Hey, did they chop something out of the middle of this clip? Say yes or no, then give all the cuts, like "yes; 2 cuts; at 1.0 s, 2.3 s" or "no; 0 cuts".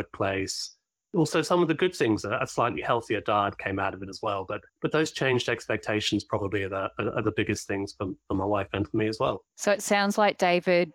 yes; 2 cuts; at 4.7 s, 9.5 s